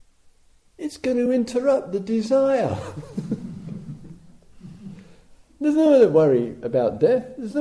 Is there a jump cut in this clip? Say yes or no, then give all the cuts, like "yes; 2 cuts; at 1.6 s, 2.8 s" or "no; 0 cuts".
no; 0 cuts